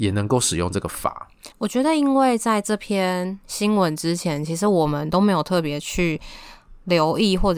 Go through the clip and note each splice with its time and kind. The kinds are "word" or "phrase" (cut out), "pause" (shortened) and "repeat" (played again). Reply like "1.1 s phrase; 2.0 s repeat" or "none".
1.5 s pause